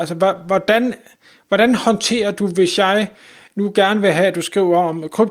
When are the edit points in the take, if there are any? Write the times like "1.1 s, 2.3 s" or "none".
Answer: none